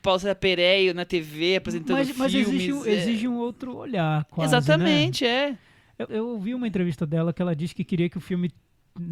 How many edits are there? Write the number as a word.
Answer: two